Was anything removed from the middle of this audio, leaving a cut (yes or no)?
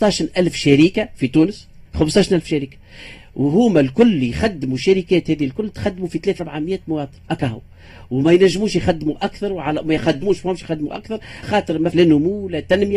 yes